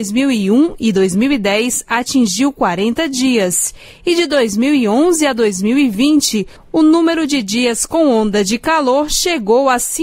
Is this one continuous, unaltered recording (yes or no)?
yes